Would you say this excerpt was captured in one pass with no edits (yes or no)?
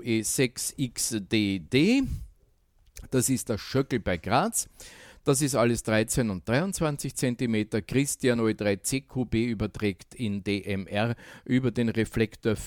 yes